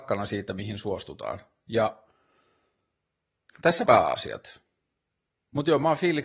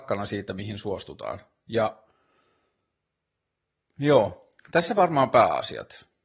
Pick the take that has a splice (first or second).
first